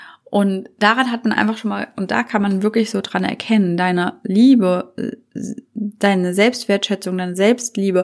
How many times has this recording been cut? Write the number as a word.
zero